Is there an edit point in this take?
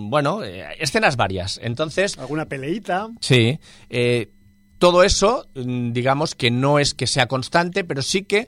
no; 0 cuts

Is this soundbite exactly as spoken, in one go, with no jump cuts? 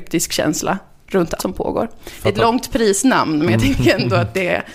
no; 1 cut; at 1.4 s

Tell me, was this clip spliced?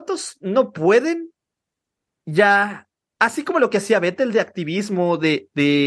no; 0 cuts

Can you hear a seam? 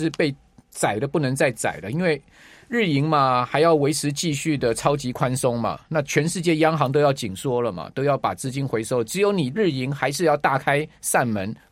no; 0 cuts

